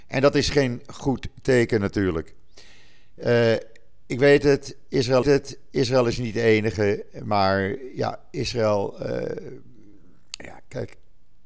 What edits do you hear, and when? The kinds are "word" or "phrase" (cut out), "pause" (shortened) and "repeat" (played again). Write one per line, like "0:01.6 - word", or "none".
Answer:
0:05.2 - repeat